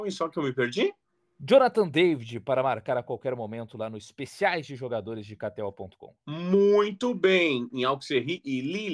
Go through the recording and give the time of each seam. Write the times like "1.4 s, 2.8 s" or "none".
none